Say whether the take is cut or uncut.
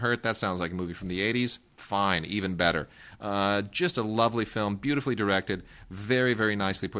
uncut